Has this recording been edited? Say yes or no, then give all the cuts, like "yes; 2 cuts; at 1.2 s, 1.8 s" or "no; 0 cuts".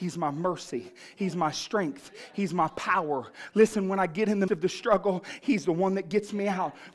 yes; 1 cut; at 4.5 s